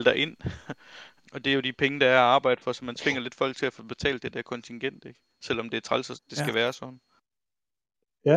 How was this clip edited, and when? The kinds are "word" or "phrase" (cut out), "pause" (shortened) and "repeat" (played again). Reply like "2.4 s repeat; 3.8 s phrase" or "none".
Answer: 1.2 s word